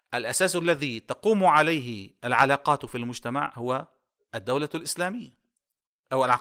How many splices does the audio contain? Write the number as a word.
zero